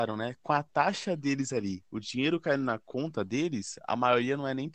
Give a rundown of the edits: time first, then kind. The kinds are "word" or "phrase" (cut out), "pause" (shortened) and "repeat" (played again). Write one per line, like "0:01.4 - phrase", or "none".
none